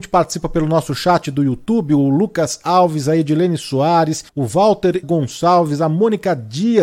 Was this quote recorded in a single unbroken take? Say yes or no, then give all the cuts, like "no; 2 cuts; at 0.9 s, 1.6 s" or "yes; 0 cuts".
no; 2 cuts; at 4.3 s, 5.0 s